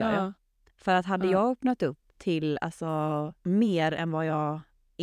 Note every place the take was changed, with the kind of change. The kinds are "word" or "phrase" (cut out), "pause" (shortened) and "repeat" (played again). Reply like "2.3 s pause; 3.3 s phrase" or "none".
2.1 s pause; 3.4 s pause